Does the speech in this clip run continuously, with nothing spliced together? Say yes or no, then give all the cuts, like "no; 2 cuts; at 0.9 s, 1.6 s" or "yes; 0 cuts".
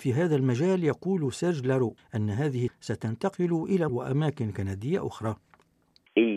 no; 3 cuts; at 2.0 s, 2.7 s, 3.9 s